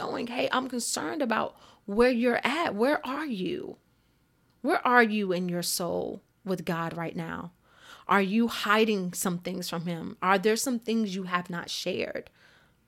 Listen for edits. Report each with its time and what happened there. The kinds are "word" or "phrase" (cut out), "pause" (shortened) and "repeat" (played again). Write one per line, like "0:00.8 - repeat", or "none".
none